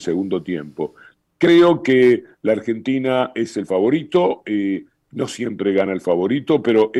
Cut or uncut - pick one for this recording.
uncut